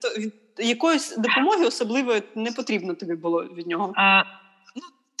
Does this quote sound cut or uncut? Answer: uncut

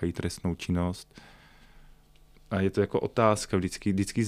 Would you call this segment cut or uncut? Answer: uncut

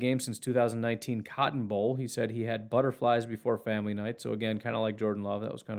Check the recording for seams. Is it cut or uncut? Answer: uncut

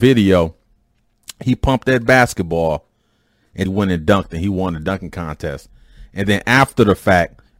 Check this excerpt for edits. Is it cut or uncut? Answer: cut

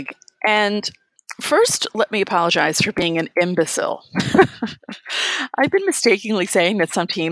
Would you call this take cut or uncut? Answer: uncut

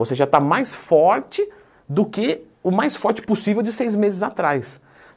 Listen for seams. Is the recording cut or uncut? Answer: cut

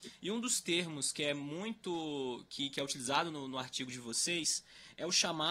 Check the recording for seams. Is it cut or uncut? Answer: uncut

